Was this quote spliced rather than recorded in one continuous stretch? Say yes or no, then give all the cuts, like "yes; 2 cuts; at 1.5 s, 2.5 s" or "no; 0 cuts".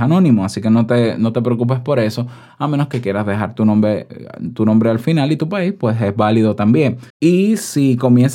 yes; 1 cut; at 7.1 s